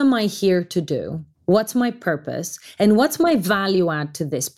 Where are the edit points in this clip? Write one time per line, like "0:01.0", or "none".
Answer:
0:01.3